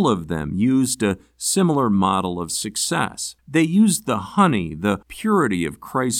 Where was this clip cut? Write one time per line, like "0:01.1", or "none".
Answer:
0:03.4
0:05.0